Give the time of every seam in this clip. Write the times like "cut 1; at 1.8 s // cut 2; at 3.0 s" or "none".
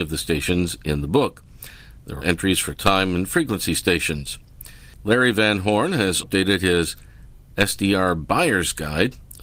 cut 1; at 2.2 s // cut 2; at 6.2 s